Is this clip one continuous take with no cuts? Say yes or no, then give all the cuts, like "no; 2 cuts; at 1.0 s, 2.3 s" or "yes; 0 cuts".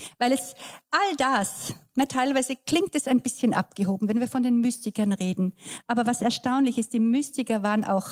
yes; 0 cuts